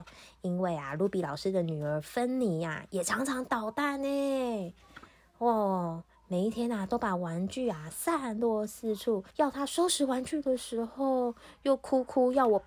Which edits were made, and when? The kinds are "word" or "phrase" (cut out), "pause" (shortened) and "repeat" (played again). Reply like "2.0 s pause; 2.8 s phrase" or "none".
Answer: 9.3 s pause